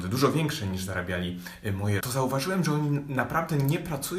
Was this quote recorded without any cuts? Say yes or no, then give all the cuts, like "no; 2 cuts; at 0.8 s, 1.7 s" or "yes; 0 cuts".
no; 1 cut; at 2.0 s